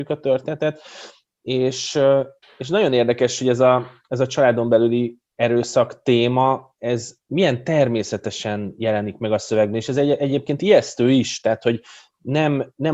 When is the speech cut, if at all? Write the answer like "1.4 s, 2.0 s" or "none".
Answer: 2.4 s, 5.3 s

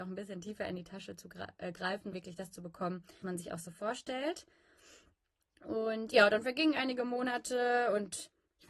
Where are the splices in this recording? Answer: 2.1 s, 3.2 s

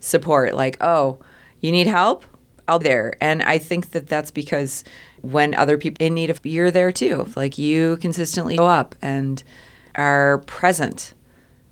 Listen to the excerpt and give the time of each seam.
2.8 s, 6.0 s, 6.4 s, 8.6 s

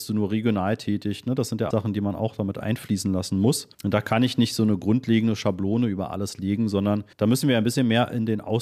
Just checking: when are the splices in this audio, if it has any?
1.7 s, 3.7 s, 7.1 s

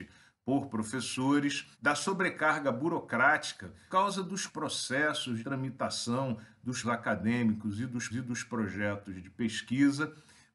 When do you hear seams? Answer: 1.7 s, 3.9 s, 4.5 s, 5.4 s, 6.8 s, 8.1 s

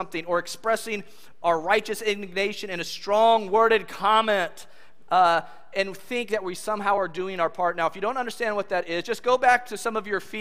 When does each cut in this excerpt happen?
none

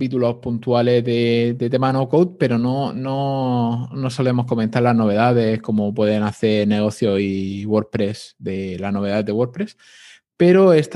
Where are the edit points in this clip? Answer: none

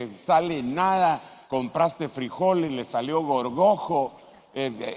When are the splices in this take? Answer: 1.4 s

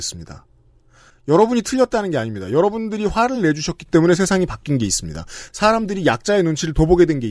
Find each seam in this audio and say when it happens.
none

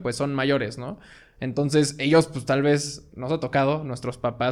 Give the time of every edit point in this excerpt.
none

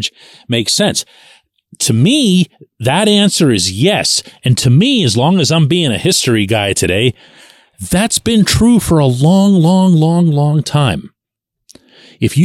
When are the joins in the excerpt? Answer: none

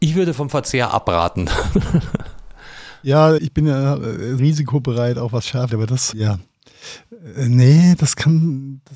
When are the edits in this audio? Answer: 3.4 s, 4.4 s, 5.7 s, 6.1 s

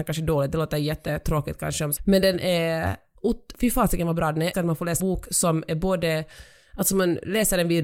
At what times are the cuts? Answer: 2.0 s, 3.5 s, 4.5 s, 5.0 s

